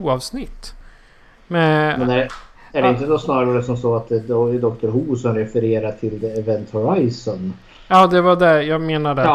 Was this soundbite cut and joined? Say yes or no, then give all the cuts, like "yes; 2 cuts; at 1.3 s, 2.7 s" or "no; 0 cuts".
no; 0 cuts